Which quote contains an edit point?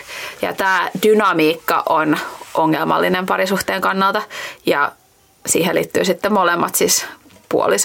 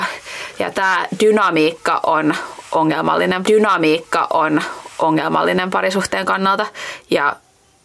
second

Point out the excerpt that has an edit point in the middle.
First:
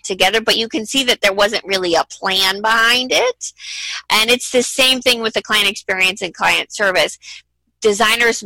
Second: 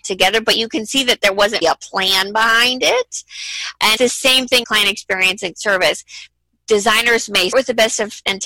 second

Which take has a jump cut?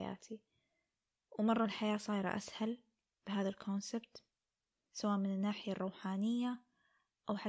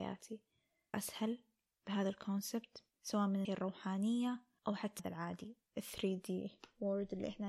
second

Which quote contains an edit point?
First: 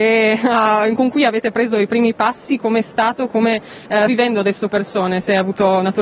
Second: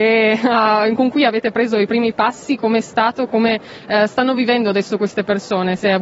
first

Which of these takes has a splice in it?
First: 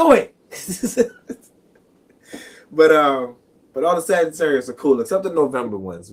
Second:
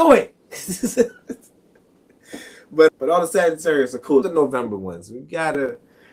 second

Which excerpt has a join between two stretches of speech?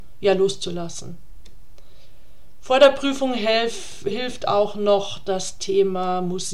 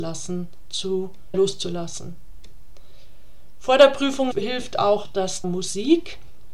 second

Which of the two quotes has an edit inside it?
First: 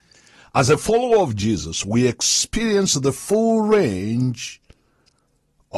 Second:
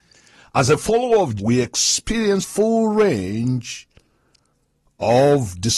second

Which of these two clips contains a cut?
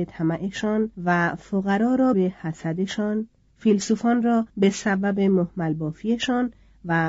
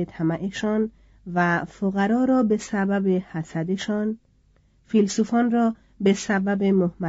first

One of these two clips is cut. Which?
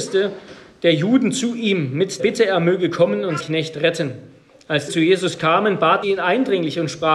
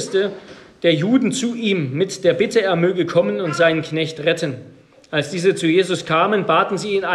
first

